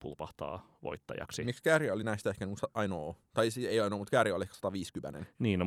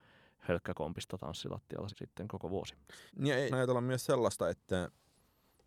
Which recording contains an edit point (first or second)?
second